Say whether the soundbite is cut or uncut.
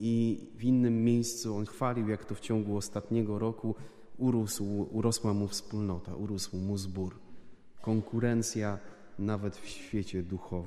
cut